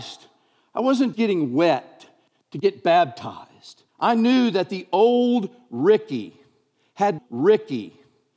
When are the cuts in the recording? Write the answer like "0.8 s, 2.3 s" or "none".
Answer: 1.1 s, 3.9 s, 7.2 s